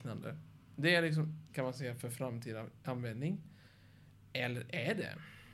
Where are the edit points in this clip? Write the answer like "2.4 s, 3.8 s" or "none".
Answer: 1.5 s